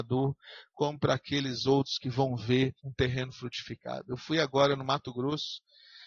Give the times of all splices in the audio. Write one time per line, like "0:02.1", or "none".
0:02.8